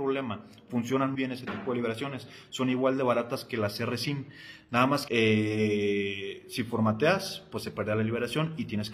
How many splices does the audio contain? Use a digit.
2